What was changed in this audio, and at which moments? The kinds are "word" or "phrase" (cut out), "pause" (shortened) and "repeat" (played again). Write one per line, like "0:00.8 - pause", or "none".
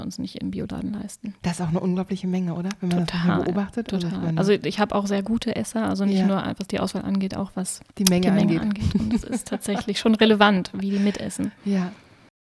0:07.9 - pause